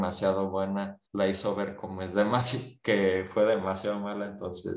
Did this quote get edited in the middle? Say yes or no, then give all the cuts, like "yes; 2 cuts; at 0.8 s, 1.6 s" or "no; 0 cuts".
yes; 1 cut; at 1.0 s